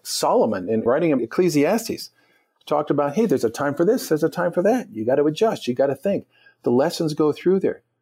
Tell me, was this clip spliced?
no; 0 cuts

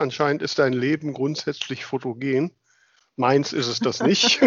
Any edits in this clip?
no; 0 cuts

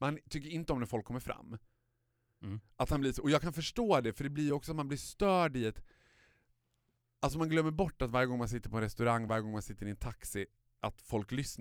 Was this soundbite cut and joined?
no; 0 cuts

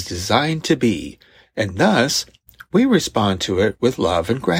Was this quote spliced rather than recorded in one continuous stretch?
no; 0 cuts

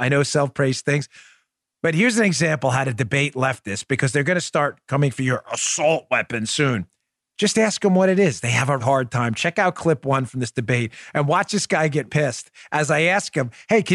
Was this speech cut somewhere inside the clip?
yes; 2 cuts; at 8.8 s, 12.1 s

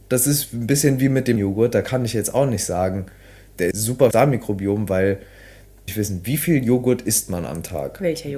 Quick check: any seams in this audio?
yes; 4 cuts; at 1.4 s, 3.7 s, 4.1 s, 5.9 s

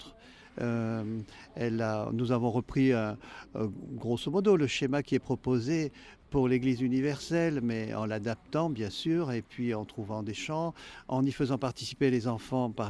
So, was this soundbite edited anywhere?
no; 0 cuts

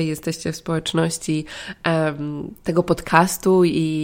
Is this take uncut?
yes; 0 cuts

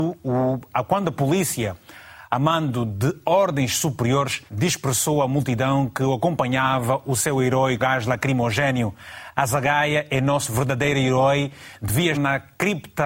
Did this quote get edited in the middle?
yes; 3 cuts; at 4.5 s, 7.8 s, 12.1 s

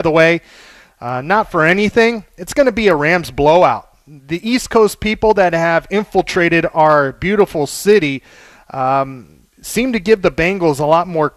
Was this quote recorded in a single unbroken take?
yes; 0 cuts

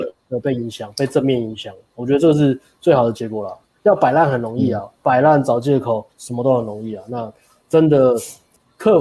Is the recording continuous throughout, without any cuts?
no; 1 cut; at 6.1 s

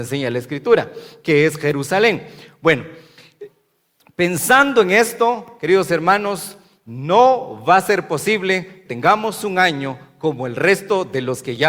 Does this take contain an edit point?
yes; 1 cut; at 8.9 s

